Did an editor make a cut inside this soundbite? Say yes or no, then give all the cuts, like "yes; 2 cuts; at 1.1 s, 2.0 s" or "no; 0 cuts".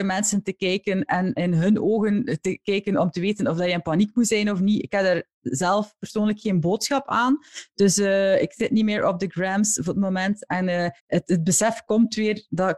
yes; 1 cut; at 11.0 s